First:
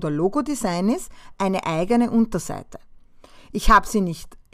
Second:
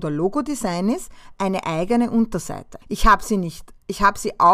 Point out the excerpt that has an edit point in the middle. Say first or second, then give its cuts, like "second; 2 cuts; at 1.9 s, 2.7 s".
second; 1 cut; at 2.8 s